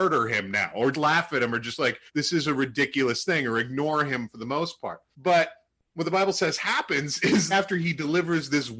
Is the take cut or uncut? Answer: cut